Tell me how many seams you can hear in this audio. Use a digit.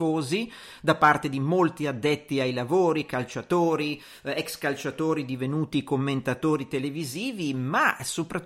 0